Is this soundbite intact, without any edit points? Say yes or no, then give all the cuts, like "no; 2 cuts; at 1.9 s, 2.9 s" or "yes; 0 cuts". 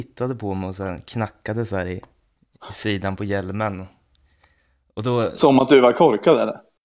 no; 1 cut; at 2.2 s